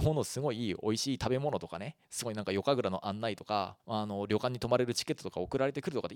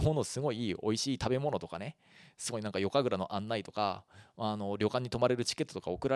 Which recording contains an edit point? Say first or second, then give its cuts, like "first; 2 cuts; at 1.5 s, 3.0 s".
first; 2 cuts; at 2.0 s, 3.8 s